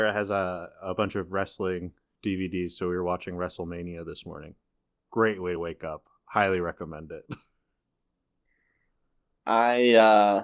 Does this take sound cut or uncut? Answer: uncut